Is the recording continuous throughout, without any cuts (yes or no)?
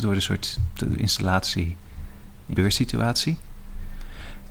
no